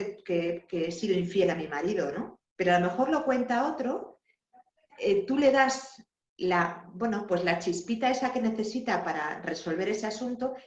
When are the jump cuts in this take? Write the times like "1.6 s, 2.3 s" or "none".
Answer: 2.4 s